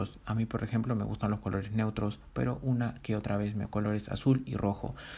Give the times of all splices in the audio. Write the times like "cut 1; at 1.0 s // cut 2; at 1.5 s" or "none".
cut 1; at 3.6 s